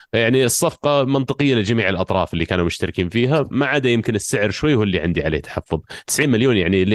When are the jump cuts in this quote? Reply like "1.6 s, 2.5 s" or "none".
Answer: none